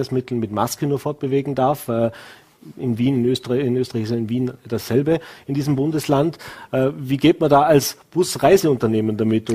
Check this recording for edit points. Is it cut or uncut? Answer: uncut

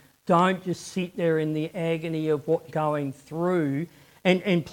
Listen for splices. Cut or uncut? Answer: cut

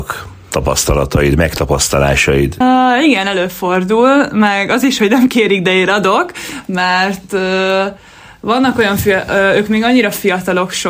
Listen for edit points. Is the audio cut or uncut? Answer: uncut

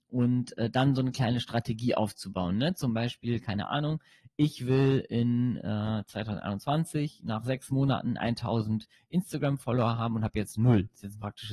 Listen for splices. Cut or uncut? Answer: uncut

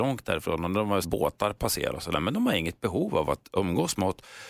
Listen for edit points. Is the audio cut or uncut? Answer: cut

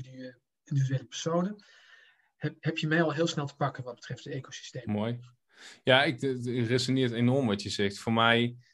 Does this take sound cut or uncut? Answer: uncut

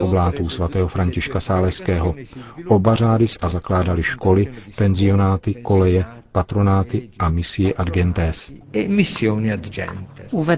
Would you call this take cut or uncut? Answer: cut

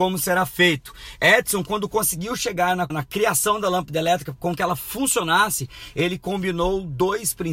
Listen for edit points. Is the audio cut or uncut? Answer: cut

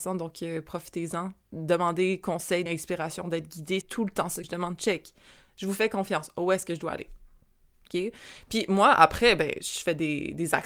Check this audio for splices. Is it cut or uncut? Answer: cut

